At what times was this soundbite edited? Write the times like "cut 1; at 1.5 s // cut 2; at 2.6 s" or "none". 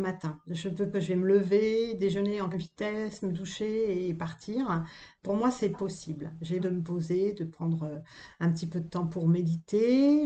cut 1; at 0.9 s // cut 2; at 2.5 s // cut 3; at 5.7 s // cut 4; at 6.6 s